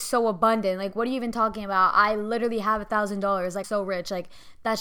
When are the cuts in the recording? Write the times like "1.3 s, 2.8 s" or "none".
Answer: 3.6 s